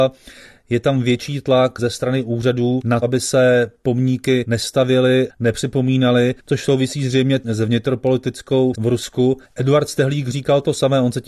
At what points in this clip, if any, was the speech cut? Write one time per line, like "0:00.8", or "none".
0:03.0
0:05.3
0:06.4
0:08.7
0:09.4